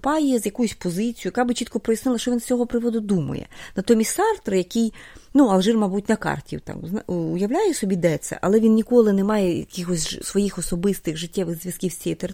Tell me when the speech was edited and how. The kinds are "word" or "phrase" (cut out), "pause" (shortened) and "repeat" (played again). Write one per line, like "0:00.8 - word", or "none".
0:10.2 - word